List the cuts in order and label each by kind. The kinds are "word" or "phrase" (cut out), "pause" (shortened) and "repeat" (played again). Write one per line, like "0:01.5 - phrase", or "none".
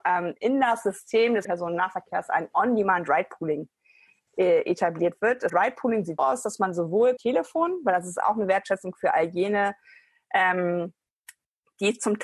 0:01.4 - word
0:05.5 - word
0:06.2 - word
0:07.2 - word